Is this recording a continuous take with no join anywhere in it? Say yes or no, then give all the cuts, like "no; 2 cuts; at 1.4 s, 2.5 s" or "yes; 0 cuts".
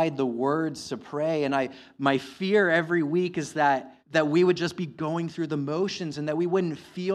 no; 1 cut; at 4.0 s